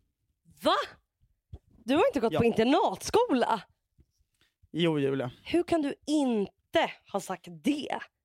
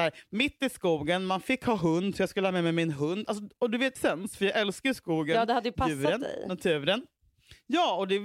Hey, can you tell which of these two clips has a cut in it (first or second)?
second